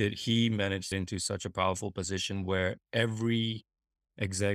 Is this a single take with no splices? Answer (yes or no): no